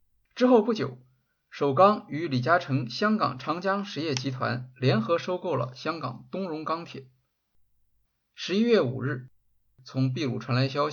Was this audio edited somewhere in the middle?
no; 0 cuts

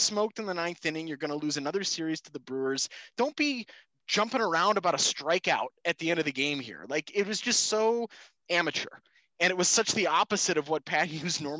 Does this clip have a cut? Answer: no; 0 cuts

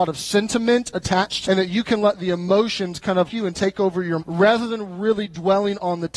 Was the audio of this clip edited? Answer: yes; 3 cuts; at 1.4 s, 3.3 s, 4.2 s

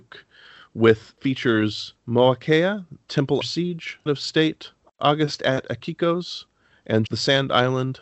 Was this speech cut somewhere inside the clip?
yes; 5 cuts; at 2.0 s, 3.4 s, 4.1 s, 4.8 s, 7.1 s

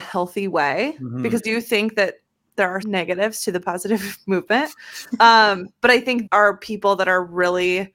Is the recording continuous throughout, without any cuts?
no; 4 cuts; at 1.4 s, 2.8 s, 3.6 s, 6.3 s

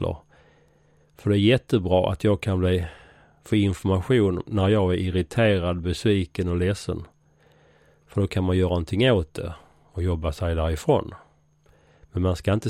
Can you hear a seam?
no; 0 cuts

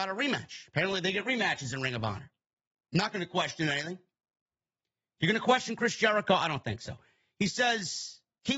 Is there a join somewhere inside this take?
no; 0 cuts

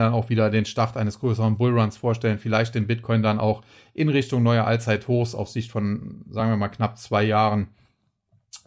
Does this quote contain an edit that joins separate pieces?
no; 0 cuts

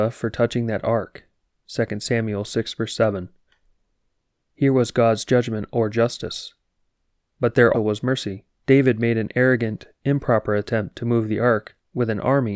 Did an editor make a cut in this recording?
yes; 2 cuts; at 7.7 s, 8.5 s

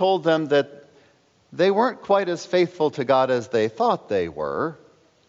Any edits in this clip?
no; 0 cuts

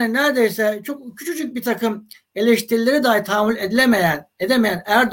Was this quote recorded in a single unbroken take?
yes; 0 cuts

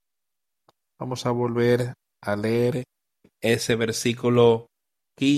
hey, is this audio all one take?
yes; 0 cuts

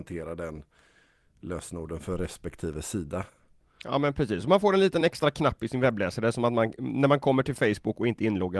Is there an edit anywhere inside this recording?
no; 0 cuts

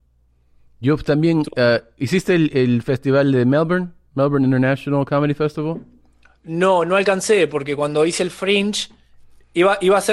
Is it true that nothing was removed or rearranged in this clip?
no; 1 cut; at 2.5 s

